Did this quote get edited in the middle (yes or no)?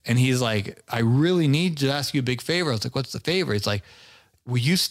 no